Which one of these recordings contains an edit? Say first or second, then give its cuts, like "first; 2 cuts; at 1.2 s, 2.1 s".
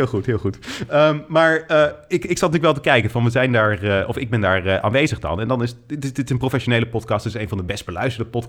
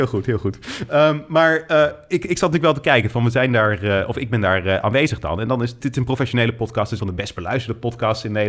second; 2 cuts; at 5.8 s, 7.0 s